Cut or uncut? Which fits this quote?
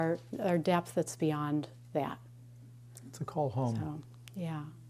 uncut